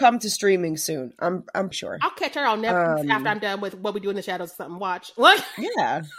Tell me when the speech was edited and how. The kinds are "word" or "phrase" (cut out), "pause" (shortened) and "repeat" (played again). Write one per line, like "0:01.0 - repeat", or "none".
0:01.7 - word

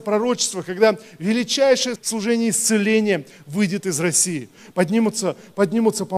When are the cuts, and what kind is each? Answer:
0:01.9 - word

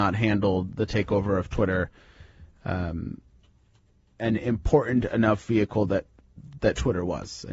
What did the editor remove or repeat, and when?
none

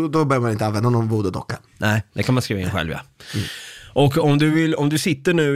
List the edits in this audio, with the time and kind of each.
none

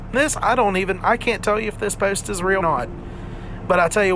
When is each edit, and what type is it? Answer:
0:02.6 - word

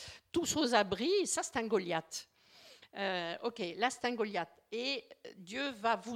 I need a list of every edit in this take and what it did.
none

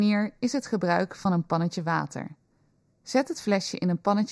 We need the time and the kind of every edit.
none

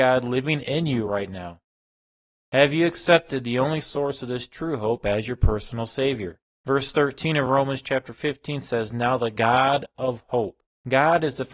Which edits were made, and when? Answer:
none

